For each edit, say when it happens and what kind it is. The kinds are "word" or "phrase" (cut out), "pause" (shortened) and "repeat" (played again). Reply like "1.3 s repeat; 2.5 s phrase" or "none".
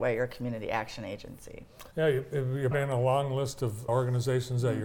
1.9 s pause; 2.7 s word; 3.9 s word